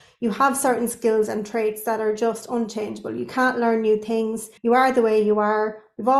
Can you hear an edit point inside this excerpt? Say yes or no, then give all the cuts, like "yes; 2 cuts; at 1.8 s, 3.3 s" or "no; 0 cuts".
yes; 1 cut; at 4.6 s